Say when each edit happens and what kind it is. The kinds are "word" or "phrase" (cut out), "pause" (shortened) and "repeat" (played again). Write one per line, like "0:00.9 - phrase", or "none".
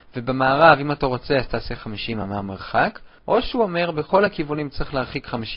none